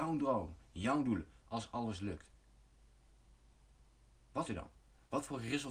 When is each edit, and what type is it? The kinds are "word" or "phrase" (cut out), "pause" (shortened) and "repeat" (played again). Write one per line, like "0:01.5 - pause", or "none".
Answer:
0:01.4 - word
0:04.5 - word